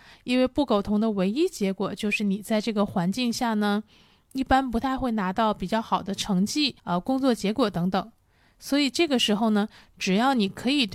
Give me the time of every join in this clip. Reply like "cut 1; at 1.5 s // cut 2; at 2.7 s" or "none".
cut 1; at 6.8 s